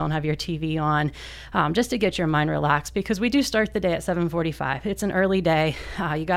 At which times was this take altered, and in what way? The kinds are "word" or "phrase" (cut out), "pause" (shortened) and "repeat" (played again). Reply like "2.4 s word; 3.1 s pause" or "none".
none